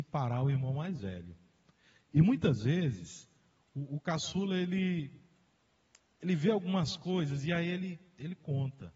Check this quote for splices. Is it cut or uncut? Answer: uncut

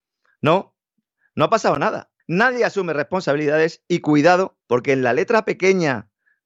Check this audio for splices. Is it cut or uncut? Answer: cut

